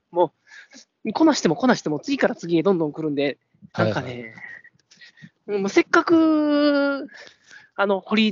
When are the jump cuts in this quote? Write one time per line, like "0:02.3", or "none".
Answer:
0:03.7
0:05.3

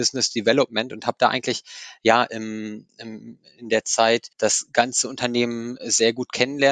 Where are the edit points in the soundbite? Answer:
0:04.3

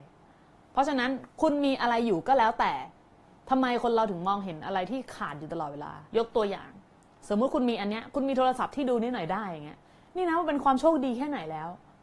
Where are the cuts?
0:06.1

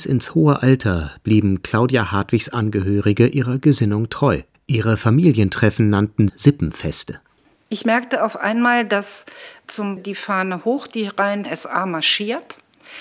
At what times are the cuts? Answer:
0:04.5
0:06.3
0:10.0
0:11.4

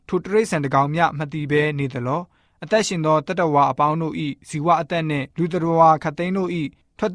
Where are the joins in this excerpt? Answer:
0:05.3

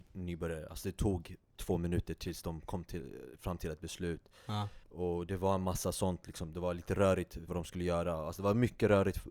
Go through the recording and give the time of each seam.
0:04.8
0:07.5

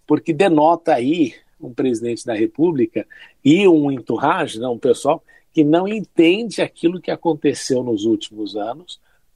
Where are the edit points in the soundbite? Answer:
none

